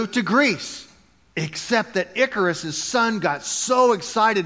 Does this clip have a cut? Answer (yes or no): no